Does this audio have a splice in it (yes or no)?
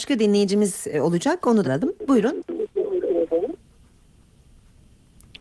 yes